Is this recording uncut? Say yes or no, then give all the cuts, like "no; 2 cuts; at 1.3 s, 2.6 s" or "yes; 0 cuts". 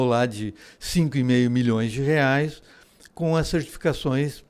yes; 0 cuts